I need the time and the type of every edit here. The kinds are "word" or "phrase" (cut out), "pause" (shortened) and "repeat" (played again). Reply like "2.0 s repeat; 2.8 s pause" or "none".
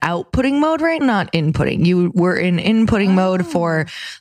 1.0 s word